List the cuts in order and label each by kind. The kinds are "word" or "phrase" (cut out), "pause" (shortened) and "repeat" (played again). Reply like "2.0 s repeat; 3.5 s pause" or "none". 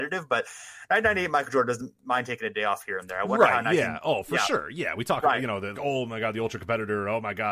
5.7 s word